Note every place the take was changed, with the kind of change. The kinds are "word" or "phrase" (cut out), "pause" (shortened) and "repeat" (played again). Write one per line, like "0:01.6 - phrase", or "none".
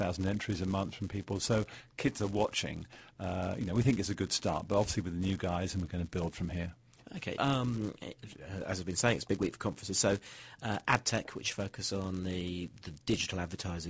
0:07.4 - word